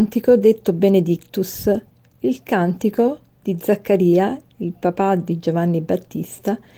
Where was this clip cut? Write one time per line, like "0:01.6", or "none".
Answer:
none